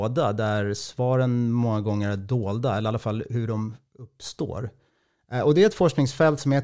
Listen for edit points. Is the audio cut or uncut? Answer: uncut